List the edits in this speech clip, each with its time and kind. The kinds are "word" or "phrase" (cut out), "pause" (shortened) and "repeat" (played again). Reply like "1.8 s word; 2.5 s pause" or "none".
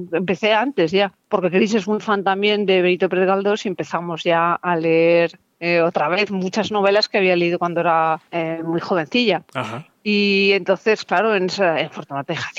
none